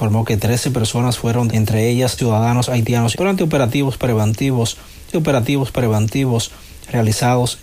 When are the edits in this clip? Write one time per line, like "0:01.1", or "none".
0:01.5
0:02.2
0:03.1
0:05.1